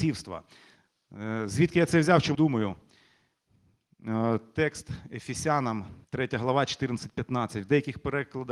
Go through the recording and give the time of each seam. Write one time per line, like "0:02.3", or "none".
0:02.3
0:06.0